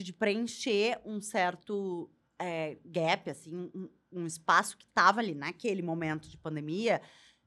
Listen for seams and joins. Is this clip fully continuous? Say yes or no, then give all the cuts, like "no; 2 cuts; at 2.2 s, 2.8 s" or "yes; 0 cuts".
yes; 0 cuts